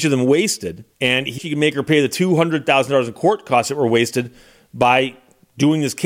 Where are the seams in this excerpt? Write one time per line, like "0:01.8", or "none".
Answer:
0:00.9
0:01.4